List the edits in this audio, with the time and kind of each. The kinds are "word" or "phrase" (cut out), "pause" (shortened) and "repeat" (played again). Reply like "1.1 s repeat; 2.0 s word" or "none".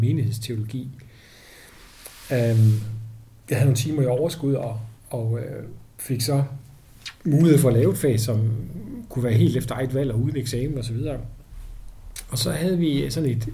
5.0 s pause